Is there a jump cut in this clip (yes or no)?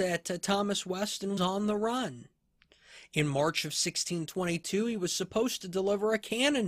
yes